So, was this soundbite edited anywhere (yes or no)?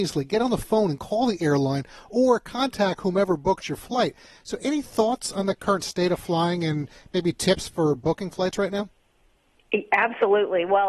no